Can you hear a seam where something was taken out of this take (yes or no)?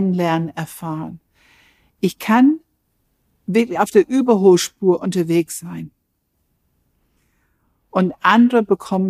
no